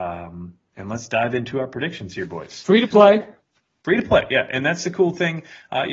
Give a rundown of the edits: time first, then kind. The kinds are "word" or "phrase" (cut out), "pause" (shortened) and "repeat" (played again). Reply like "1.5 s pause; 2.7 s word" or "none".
none